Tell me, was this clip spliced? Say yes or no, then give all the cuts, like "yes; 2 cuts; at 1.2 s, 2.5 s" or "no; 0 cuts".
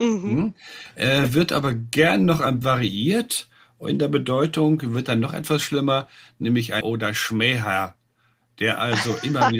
yes; 2 cuts; at 2.6 s, 6.8 s